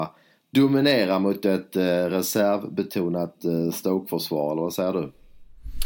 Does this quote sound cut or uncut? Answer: uncut